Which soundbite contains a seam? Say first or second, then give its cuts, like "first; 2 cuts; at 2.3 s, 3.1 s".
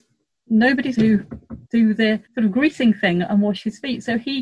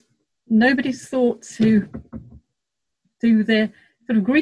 first; 3 cuts; at 0.9 s, 1.7 s, 2.3 s